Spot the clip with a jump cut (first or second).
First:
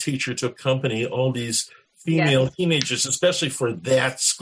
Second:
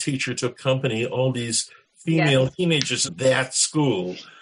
second